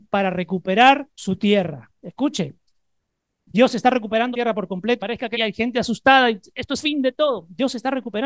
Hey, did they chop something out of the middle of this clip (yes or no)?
yes